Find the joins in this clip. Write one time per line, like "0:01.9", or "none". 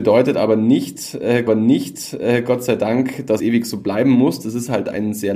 0:01.5
0:03.4